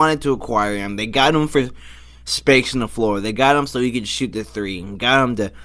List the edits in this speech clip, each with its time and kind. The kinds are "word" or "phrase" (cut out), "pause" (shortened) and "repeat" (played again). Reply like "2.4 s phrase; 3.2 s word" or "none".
none